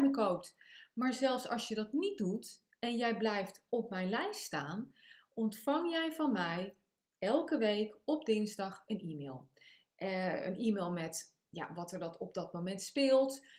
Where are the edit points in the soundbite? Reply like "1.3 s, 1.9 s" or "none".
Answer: none